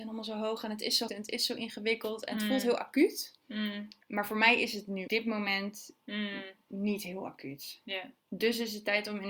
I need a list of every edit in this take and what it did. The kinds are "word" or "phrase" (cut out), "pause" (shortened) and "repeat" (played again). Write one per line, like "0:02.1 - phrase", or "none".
0:01.1 - word
0:04.0 - pause
0:05.1 - word